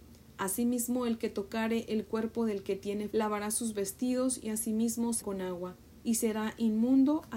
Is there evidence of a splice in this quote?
yes; 2 cuts; at 3.1 s, 5.2 s

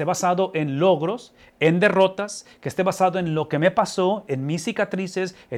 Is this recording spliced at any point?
no; 0 cuts

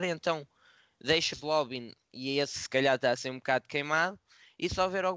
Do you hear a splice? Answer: yes; 1 cut; at 1.3 s

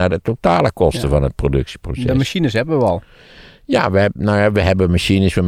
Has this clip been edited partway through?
no; 0 cuts

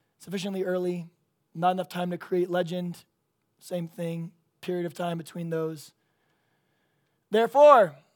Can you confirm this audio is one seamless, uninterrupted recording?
yes; 0 cuts

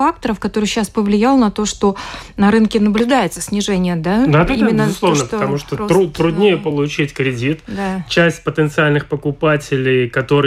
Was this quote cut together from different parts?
no; 0 cuts

